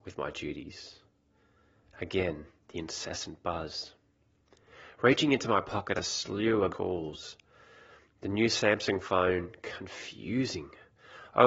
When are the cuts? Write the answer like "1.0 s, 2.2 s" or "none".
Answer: 2.6 s, 6.0 s, 6.7 s